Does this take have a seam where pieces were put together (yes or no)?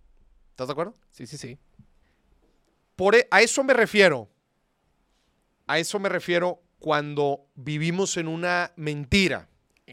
yes